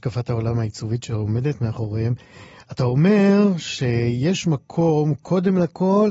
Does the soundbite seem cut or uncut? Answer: uncut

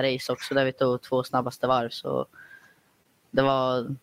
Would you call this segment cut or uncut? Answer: uncut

